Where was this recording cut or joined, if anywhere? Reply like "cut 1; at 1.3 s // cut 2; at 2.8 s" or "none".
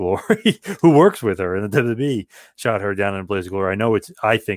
none